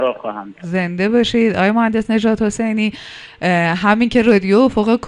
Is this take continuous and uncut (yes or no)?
yes